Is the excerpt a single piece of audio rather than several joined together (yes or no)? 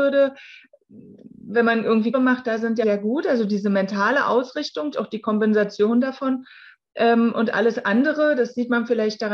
no